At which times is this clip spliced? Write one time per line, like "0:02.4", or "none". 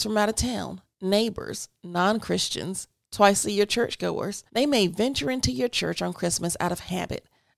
0:04.5